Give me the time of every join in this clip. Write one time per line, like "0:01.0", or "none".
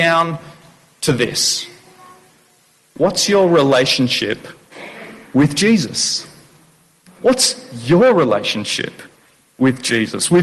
none